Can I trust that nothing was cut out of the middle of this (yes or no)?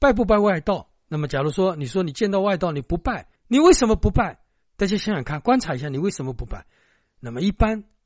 no